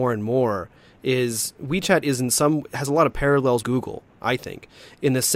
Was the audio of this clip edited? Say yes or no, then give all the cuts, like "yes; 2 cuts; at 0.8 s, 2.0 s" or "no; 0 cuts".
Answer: yes; 1 cut; at 3.6 s